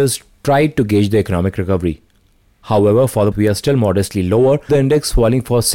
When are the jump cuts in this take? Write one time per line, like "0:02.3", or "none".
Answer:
0:03.3
0:04.7